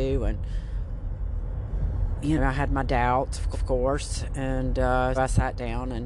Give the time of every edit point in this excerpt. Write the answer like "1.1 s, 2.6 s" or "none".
2.4 s, 3.5 s, 5.2 s